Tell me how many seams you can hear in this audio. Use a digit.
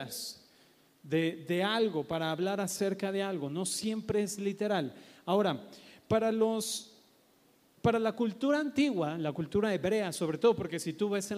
0